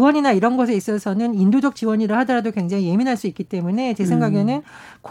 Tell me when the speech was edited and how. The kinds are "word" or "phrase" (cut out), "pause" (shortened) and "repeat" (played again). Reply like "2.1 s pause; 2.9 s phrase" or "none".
none